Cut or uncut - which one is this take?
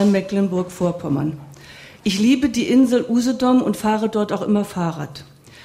uncut